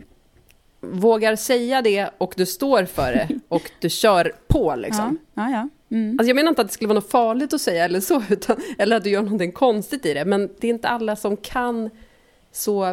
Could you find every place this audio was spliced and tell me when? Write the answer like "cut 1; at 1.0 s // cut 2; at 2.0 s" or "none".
none